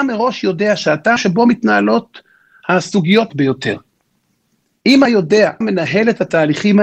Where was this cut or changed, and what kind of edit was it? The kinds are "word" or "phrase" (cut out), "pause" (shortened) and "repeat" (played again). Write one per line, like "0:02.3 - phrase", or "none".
0:01.2 - word
0:03.3 - word
0:05.1 - word
0:05.6 - word